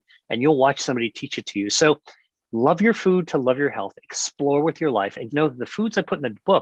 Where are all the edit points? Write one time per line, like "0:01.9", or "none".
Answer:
0:05.3

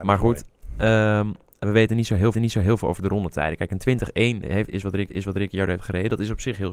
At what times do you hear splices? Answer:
0:01.6
0:02.3
0:05.1

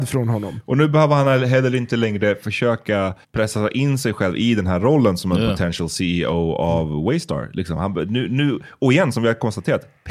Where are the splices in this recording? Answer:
0:03.2

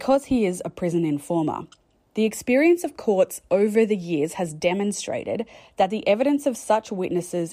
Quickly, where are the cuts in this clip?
none

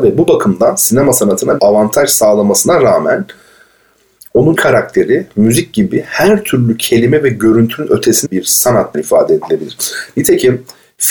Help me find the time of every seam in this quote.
0:01.6
0:04.6
0:08.3
0:08.9

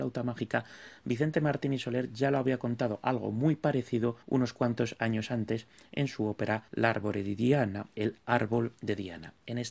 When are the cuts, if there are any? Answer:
0:04.2
0:06.7

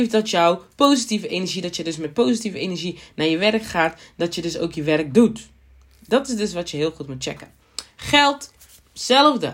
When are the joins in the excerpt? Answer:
none

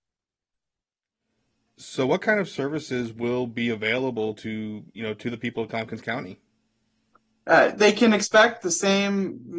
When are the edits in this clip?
none

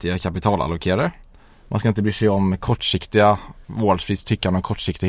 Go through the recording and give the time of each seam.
0:03.6

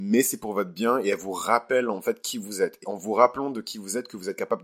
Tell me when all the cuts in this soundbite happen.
0:02.8

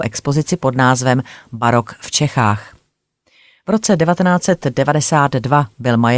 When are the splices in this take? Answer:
none

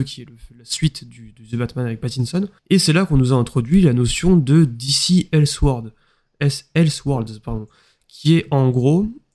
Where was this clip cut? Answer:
0:02.6

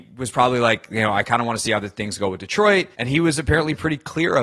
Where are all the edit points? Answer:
0:02.9

